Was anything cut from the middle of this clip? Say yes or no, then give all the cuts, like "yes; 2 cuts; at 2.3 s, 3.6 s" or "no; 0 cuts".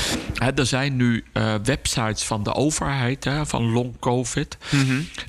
no; 0 cuts